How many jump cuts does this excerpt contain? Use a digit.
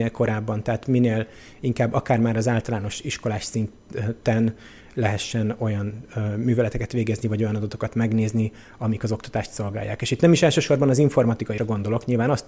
1